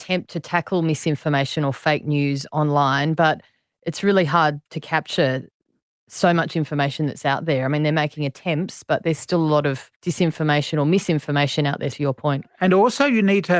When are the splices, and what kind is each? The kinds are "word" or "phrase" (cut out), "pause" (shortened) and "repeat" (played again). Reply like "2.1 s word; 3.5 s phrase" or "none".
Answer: 4.7 s pause; 10.0 s pause; 11.9 s word